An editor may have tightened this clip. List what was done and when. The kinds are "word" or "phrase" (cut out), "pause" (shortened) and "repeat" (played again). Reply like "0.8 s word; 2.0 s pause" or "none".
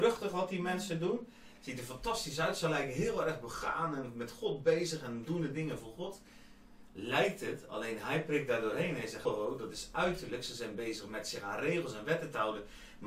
9.2 s word